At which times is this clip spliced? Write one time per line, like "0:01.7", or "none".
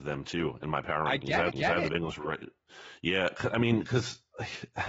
0:01.5